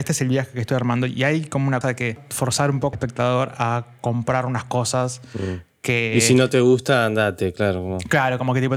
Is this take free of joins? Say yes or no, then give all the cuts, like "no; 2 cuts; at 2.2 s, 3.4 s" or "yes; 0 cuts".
no; 2 cuts; at 1.8 s, 2.9 s